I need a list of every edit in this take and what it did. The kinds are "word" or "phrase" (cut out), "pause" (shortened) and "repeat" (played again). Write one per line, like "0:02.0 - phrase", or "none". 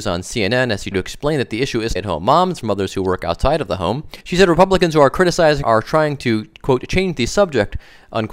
0:00.9 - word
0:02.0 - phrase
0:02.6 - word
0:04.2 - pause
0:05.6 - word